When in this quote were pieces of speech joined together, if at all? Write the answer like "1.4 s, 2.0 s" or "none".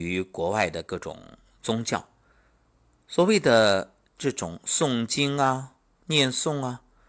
none